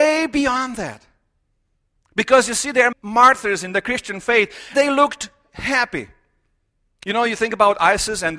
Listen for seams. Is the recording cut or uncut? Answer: cut